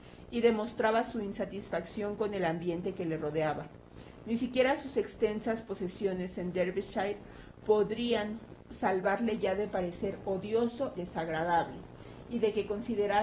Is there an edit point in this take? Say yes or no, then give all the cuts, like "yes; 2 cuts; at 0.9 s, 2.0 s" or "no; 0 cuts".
yes; 1 cut; at 11.0 s